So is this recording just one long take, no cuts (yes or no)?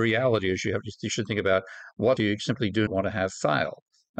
no